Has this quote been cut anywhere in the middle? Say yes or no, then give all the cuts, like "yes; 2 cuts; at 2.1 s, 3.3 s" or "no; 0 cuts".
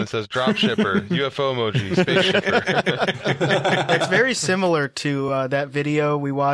no; 0 cuts